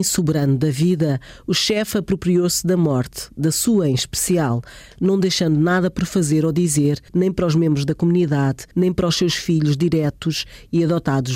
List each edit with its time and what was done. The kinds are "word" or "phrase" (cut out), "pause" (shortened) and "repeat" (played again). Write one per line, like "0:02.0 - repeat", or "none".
0:07.1 - pause
0:08.7 - pause